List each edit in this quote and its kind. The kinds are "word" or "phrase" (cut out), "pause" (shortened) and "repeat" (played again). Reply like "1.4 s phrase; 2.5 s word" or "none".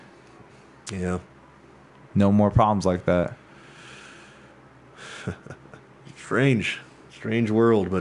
none